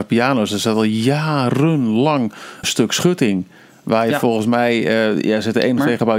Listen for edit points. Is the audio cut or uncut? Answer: cut